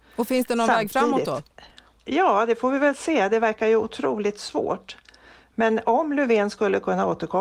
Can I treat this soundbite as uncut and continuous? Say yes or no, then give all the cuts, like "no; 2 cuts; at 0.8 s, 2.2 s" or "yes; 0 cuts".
yes; 0 cuts